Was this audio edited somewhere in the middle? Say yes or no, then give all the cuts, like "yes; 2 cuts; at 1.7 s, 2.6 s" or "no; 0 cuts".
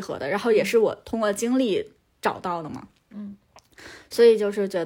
no; 0 cuts